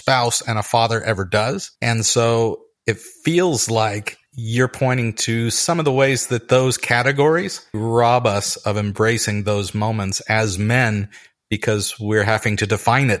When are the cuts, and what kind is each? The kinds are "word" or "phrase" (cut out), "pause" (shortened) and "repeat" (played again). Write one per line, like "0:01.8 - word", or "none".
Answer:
0:01.8 - pause
0:03.1 - pause
0:04.3 - pause
0:07.7 - word